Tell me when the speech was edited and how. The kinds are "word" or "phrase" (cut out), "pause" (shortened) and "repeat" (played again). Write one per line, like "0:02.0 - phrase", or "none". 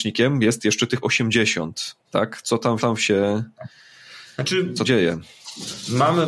0:01.0 - phrase
0:02.0 - pause
0:02.8 - repeat
0:04.8 - phrase